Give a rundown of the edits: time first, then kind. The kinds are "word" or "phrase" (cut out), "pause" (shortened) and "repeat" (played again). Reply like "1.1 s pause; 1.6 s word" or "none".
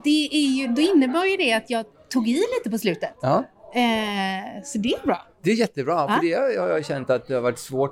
none